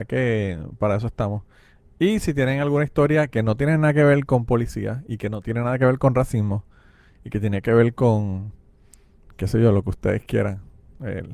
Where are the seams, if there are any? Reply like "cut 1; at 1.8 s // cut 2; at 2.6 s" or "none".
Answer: none

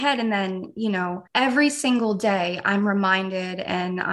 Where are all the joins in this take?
cut 1; at 1.3 s

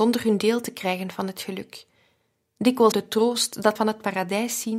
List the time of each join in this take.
cut 1; at 2.9 s // cut 2; at 3.8 s

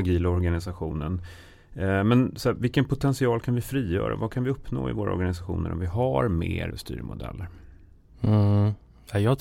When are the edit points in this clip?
cut 1; at 6.7 s

